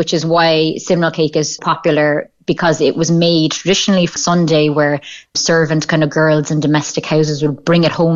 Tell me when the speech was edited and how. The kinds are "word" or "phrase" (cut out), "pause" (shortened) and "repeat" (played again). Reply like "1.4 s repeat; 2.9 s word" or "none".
1.6 s word; 4.2 s word; 5.3 s word